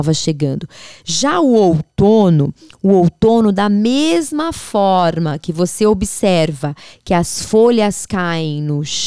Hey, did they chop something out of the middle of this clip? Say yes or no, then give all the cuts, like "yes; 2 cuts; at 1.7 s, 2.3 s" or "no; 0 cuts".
no; 0 cuts